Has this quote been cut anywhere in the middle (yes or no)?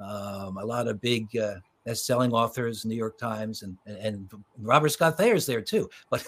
yes